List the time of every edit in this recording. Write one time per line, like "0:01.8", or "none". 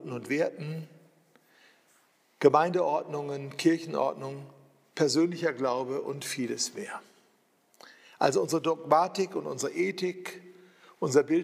none